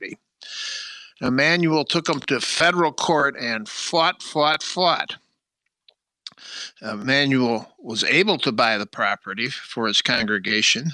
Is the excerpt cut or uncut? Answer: uncut